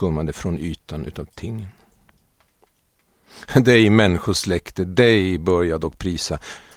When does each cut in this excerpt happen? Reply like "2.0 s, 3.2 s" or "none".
none